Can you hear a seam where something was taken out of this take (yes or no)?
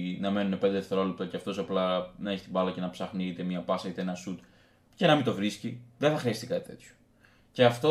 no